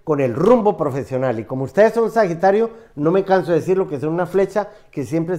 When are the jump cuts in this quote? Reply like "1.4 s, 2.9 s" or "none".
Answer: none